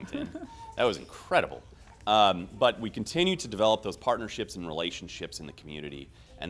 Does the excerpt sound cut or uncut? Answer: uncut